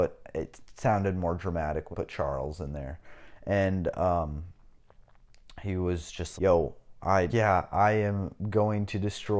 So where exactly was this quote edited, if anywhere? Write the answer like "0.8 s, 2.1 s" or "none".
1.9 s, 6.4 s, 7.3 s